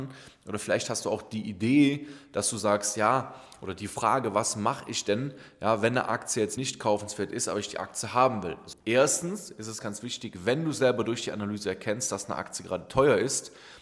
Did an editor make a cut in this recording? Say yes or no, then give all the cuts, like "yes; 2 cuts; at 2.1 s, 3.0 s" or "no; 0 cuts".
yes; 3 cuts; at 6.6 s, 8.7 s, 9.8 s